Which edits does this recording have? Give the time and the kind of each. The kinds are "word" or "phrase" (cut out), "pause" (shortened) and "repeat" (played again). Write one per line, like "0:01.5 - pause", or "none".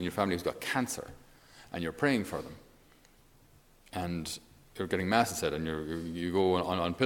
none